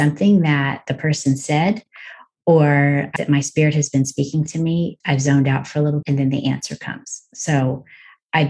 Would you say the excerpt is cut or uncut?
cut